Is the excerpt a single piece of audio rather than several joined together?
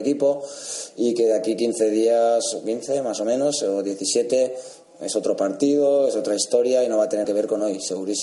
no; 1 cut; at 7.2 s

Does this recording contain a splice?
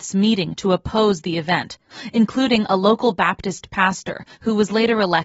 no; 0 cuts

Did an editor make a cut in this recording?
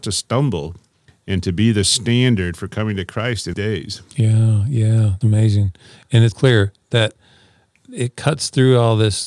yes; 3 cuts; at 3.5 s, 5.2 s, 6.3 s

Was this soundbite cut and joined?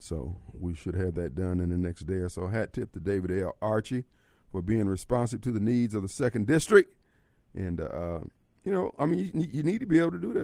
no; 0 cuts

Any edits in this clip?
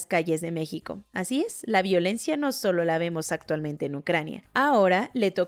no; 0 cuts

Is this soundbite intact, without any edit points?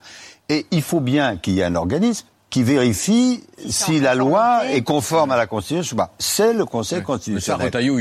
no; 1 cut; at 2.3 s

